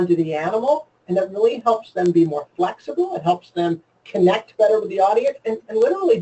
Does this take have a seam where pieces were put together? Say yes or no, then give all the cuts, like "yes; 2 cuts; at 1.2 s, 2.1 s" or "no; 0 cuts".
no; 0 cuts